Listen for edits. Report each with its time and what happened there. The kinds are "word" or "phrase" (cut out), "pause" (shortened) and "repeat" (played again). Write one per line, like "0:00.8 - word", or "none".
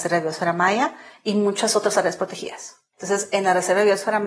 none